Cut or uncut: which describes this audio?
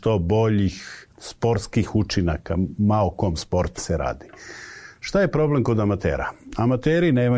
cut